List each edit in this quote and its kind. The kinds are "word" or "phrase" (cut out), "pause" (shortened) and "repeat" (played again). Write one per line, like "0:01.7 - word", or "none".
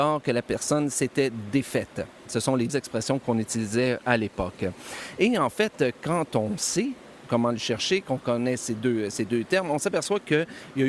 0:02.7 - word
0:07.3 - word